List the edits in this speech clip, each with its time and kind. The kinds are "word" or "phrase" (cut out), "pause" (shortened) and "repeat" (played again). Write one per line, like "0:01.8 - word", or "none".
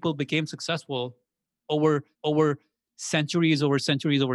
0:02.1 - repeat